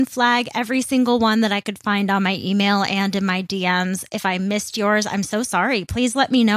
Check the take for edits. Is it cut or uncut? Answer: uncut